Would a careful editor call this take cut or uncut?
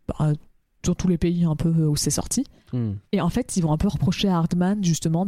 cut